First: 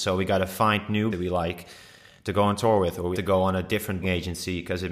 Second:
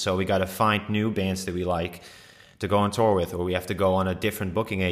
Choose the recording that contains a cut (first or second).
first